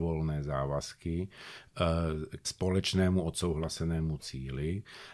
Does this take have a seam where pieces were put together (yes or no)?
yes